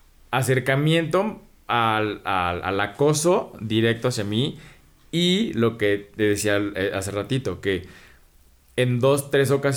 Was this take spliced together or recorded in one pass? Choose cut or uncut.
uncut